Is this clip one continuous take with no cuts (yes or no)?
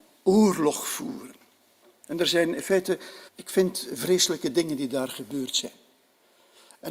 no